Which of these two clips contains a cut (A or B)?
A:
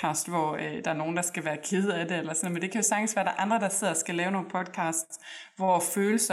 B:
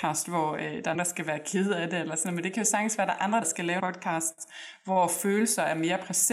B